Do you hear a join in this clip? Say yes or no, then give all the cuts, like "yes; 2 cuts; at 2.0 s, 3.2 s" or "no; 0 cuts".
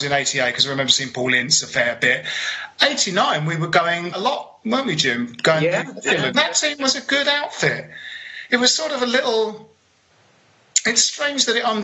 yes; 2 cuts; at 4.1 s, 6.3 s